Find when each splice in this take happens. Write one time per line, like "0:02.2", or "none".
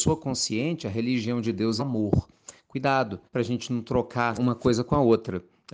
0:01.8
0:03.2
0:04.4